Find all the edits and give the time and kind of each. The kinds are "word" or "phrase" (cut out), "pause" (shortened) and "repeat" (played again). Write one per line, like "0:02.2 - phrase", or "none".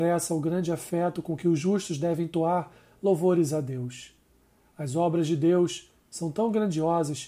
none